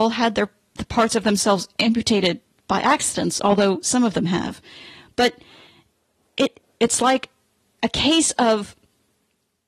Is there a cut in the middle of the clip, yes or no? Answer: no